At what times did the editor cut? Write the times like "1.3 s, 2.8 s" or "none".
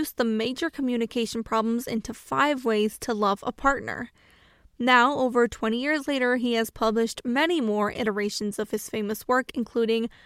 none